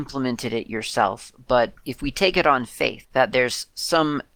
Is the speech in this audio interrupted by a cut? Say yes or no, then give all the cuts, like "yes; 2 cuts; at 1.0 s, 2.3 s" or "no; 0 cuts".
no; 0 cuts